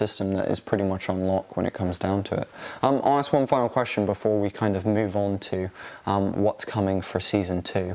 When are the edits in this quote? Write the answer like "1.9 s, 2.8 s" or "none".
none